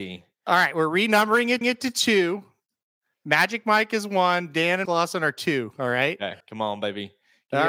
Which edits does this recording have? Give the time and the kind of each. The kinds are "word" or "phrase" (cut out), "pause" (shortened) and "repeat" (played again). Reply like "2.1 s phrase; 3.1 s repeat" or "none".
1.6 s repeat; 4.9 s word; 6.4 s pause